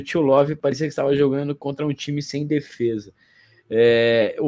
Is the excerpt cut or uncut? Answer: uncut